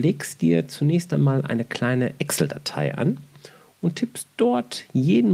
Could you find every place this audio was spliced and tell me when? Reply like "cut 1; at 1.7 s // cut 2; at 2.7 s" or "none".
none